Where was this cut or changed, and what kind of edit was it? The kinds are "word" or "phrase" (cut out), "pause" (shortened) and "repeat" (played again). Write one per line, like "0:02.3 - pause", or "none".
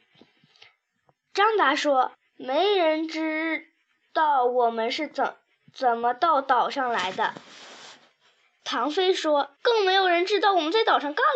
0:02.1 - pause
0:09.6 - pause